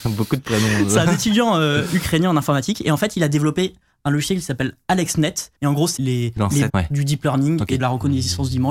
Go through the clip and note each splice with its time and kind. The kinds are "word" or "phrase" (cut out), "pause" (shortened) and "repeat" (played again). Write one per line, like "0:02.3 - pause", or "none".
0:05.5 - pause
0:06.0 - word
0:06.7 - word
0:07.8 - word